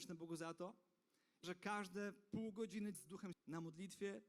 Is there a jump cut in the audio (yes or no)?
yes